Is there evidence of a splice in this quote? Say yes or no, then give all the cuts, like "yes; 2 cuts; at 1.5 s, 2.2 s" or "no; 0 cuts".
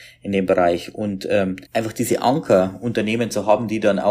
yes; 1 cut; at 1.6 s